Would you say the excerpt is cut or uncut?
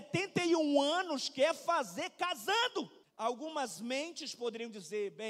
uncut